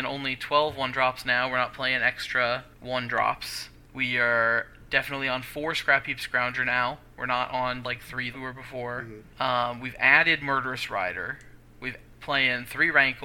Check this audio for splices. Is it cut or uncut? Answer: cut